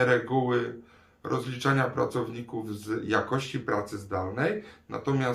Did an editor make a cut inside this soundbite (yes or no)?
no